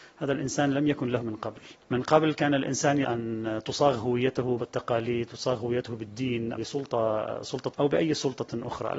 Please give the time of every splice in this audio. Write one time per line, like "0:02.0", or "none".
0:01.2
0:01.8
0:03.0
0:04.6
0:06.5
0:07.7